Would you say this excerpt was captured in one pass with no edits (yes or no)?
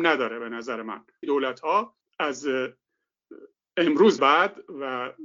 no